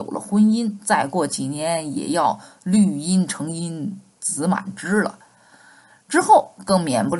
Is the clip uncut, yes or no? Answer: yes